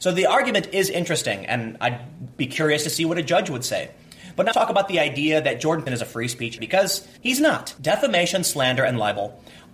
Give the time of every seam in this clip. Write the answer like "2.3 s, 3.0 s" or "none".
4.5 s, 5.9 s, 6.6 s, 7.2 s